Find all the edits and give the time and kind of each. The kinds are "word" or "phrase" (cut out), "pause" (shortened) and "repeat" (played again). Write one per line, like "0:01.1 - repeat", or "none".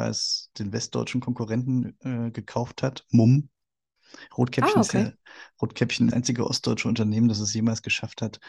0:06.1 - phrase